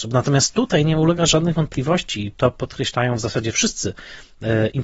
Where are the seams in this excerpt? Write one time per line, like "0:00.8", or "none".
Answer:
none